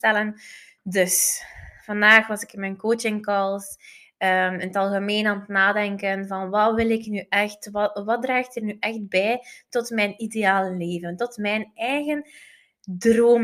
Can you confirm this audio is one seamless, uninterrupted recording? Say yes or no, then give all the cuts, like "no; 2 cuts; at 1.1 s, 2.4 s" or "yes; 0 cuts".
yes; 0 cuts